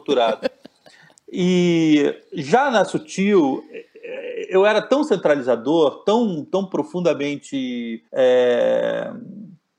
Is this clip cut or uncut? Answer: cut